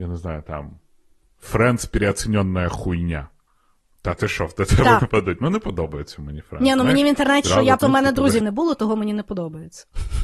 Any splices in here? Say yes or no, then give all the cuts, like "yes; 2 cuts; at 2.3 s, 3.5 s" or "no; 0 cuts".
yes; 4 cuts; at 5.0 s, 7.4 s, 7.8 s, 8.4 s